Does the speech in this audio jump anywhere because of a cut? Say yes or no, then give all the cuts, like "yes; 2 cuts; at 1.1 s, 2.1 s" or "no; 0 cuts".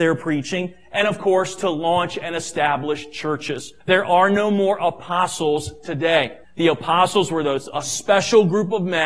yes; 2 cuts; at 3.8 s, 6.4 s